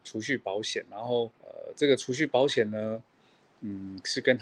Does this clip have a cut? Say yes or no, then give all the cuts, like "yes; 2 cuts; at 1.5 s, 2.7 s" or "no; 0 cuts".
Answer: yes; 1 cut; at 1.4 s